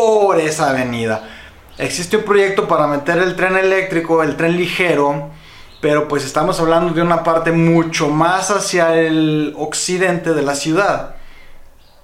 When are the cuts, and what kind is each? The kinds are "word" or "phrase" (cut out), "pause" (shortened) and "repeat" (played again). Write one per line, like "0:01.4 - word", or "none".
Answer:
none

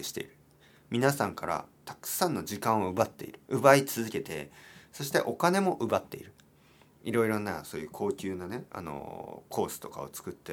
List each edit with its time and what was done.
0:01.7 - pause
0:03.4 - pause
0:08.7 - pause

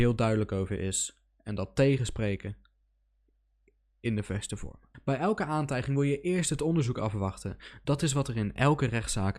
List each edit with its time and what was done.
none

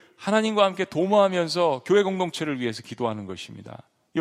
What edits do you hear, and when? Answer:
none

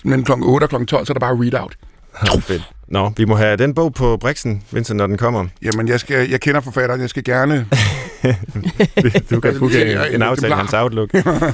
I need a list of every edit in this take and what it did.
none

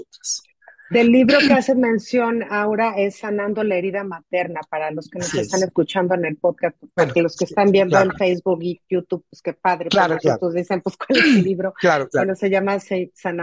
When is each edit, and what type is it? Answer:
none

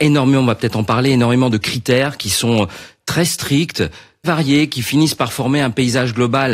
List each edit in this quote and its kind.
0:04.2 - word

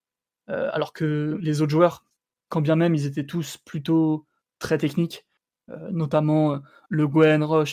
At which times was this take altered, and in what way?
none

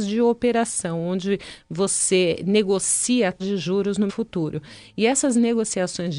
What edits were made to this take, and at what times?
0:03.4 - word
0:04.1 - word

